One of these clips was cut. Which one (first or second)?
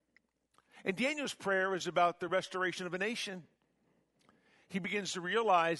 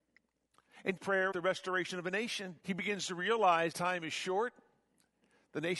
second